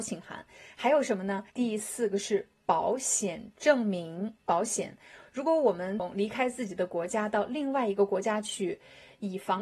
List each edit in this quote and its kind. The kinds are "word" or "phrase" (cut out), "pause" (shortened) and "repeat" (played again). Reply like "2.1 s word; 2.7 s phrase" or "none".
1.5 s pause; 4.4 s pause